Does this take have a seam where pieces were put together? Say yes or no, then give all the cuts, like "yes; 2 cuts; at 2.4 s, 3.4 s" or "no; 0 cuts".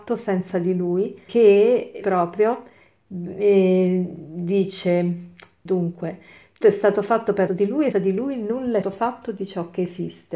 yes; 7 cuts; at 1.3 s, 2.0 s, 5.7 s, 6.6 s, 7.5 s, 7.9 s, 8.8 s